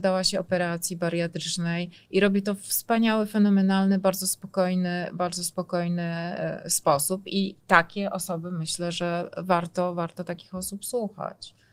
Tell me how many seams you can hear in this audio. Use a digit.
1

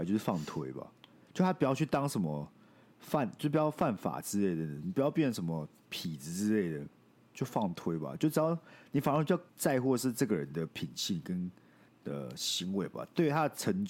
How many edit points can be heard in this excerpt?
2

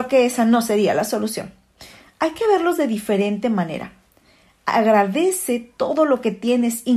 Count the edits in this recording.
0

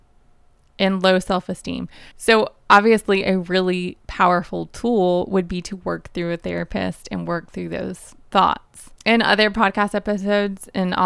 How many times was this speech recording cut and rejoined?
3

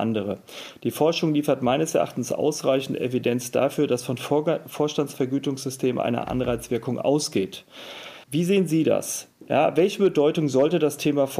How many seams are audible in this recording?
1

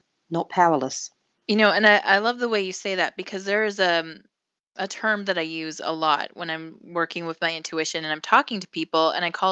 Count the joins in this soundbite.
0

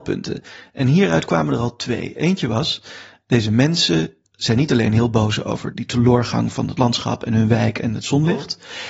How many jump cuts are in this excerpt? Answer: 1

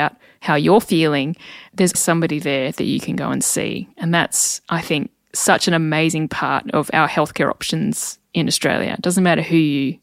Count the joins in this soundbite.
1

